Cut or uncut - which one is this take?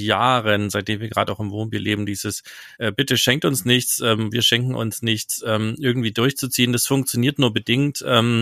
cut